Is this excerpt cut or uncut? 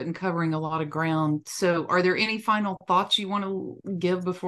uncut